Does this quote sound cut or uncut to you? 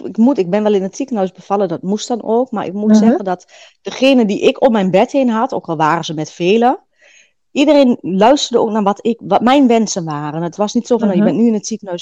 uncut